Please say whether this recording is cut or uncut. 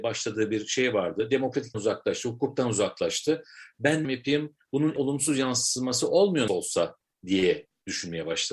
cut